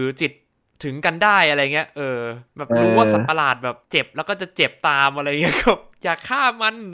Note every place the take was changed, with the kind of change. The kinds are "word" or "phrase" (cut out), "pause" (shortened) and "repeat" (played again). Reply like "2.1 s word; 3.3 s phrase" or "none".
2.5 s pause; 3.8 s pause